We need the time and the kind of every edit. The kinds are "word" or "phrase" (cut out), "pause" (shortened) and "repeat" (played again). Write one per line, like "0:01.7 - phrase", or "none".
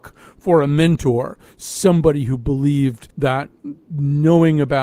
0:03.1 - pause